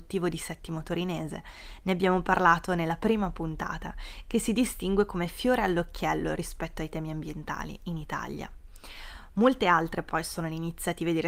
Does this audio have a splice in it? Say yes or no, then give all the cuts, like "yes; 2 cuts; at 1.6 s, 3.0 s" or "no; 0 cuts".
no; 0 cuts